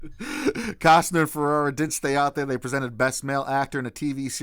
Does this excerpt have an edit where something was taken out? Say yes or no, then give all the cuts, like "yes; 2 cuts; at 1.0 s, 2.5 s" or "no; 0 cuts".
no; 0 cuts